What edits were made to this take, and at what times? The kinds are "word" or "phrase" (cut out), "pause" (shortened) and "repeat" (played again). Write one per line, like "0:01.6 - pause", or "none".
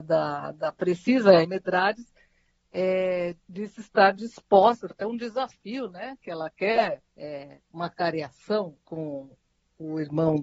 0:01.4 - word
0:03.4 - pause
0:04.9 - word
0:07.1 - pause
0:08.8 - pause

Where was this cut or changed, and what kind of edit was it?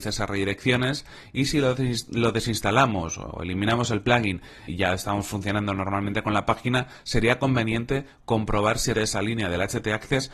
0:04.7 - word
0:08.9 - word

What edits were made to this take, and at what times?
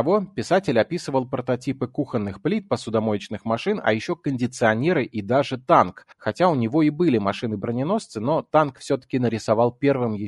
0:06.1 - pause

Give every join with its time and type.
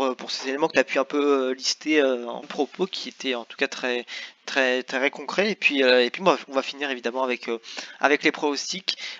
0:02.4 - phrase

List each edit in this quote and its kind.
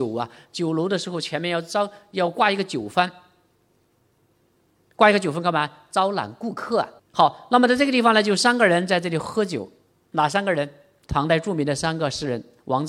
0:07.0 - pause

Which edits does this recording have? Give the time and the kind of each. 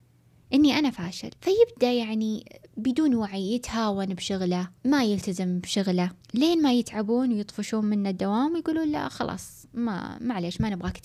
0:01.4 - pause
0:04.8 - pause
0:06.2 - pause

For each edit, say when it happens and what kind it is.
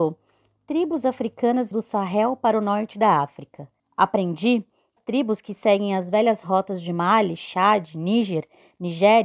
0:01.7 - word
0:03.8 - pause
0:05.0 - word

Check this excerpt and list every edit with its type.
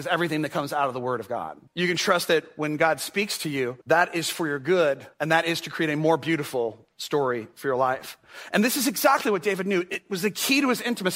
0:01.7 - pause
0:03.8 - pause
0:05.1 - pause

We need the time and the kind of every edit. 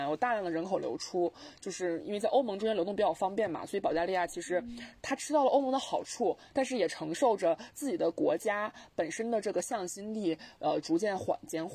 0:05.0 - word

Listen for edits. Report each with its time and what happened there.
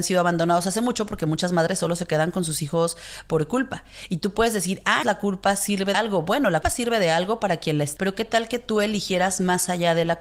0:05.0 - word
0:05.9 - word
0:06.6 - word
0:08.0 - word

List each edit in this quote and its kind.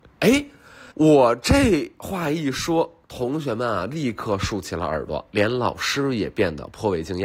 0:00.9 - pause
0:03.0 - pause

